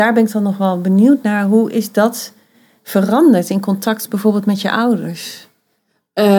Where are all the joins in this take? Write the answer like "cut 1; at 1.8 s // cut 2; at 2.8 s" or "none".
none